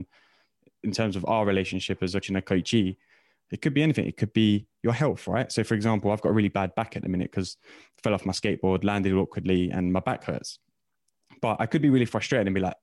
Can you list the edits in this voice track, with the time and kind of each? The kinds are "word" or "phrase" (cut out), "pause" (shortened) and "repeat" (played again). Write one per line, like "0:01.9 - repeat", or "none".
0:02.2 - word